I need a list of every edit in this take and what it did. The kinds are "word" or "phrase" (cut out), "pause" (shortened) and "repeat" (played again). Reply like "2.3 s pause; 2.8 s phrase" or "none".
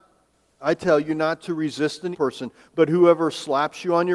2.1 s word